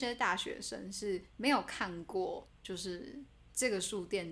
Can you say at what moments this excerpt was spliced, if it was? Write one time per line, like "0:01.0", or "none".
0:01.3
0:02.6